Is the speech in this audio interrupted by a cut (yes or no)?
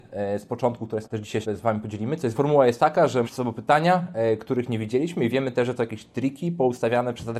yes